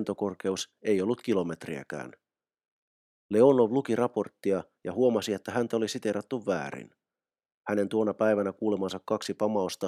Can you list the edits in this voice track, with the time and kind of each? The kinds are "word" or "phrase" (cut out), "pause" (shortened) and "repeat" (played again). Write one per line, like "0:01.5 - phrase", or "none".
none